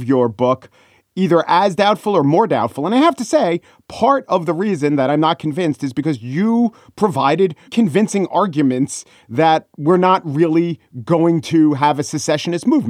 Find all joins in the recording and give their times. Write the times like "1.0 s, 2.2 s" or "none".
7.7 s

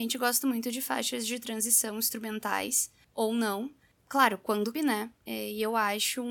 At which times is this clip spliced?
4.7 s

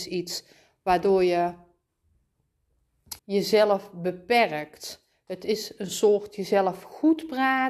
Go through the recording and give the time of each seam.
3.2 s

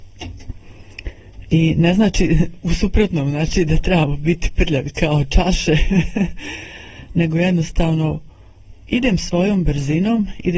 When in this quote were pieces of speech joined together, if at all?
8.8 s

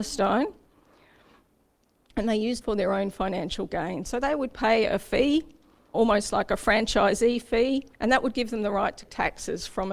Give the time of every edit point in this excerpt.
2.6 s, 5.9 s, 7.9 s, 9.0 s

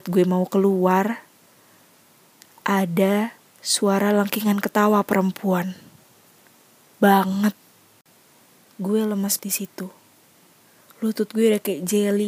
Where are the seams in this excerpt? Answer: 6.9 s, 9.4 s

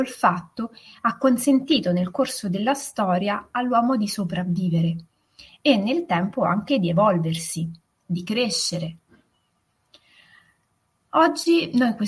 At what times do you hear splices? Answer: none

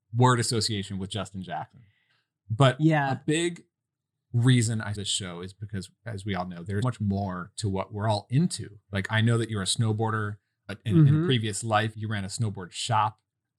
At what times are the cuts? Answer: 4.9 s, 6.8 s, 10.7 s, 11.9 s

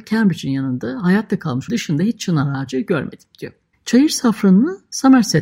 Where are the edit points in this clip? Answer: 1.7 s, 3.7 s

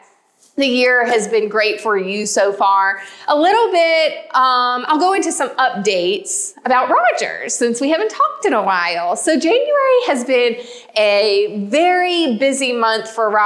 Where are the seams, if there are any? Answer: none

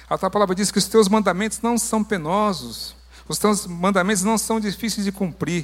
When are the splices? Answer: none

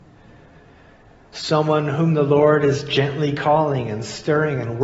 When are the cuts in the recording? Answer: none

